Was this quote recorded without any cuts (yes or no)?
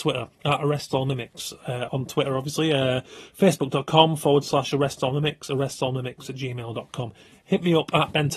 no